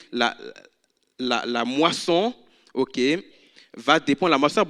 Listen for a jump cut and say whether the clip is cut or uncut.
uncut